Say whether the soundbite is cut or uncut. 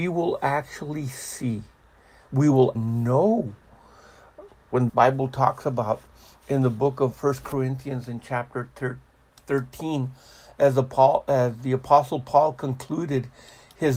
cut